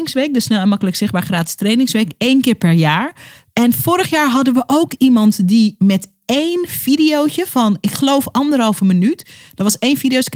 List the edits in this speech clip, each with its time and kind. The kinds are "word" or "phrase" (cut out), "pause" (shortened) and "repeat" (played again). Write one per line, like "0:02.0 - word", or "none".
none